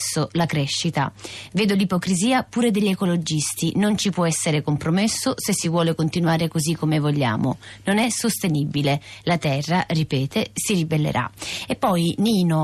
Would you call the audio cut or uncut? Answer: uncut